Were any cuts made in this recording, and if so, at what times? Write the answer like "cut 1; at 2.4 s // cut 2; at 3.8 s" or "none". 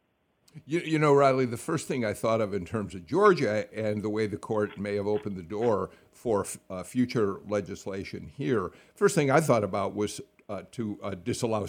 cut 1; at 3.7 s

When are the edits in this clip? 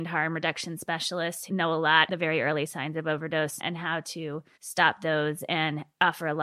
cut 1; at 1.5 s // cut 2; at 2.1 s // cut 3; at 3.6 s // cut 4; at 4.5 s

